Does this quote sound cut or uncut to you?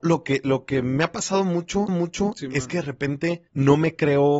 cut